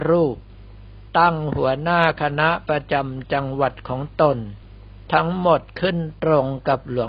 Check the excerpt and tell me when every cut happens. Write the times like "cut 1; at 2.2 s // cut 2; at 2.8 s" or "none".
cut 1; at 1.1 s